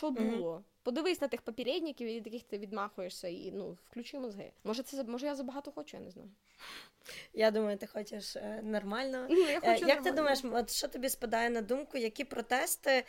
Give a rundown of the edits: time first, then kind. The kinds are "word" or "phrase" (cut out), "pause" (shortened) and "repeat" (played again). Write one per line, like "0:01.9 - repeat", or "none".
0:04.6 - pause